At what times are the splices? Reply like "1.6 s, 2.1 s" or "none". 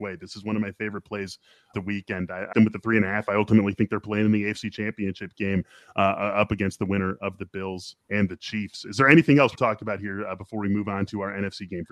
1.7 s, 2.5 s, 8.0 s, 9.6 s